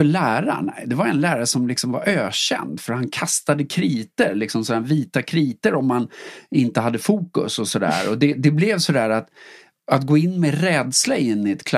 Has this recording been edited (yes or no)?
no